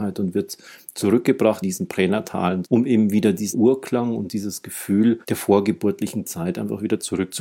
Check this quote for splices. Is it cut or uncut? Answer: cut